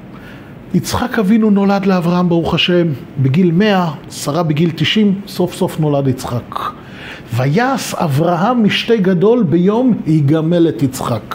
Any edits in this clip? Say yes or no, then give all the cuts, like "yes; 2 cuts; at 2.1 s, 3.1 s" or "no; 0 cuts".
no; 0 cuts